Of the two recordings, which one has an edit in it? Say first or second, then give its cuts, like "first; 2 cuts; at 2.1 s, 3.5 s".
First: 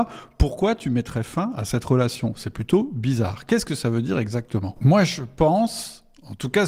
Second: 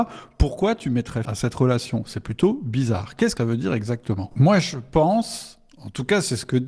second; 2 cuts; at 1.2 s, 3.4 s